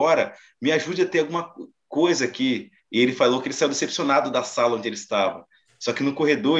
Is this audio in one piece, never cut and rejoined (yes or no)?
no